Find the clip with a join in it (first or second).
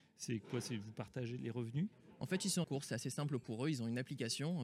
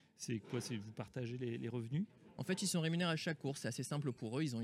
first